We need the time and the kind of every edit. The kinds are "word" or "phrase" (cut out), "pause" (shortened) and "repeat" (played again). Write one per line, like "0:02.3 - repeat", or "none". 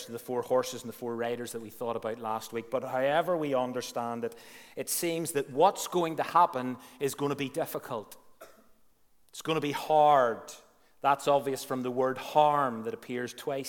none